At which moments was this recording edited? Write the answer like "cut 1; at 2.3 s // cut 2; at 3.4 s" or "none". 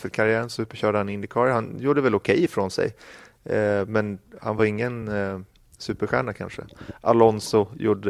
none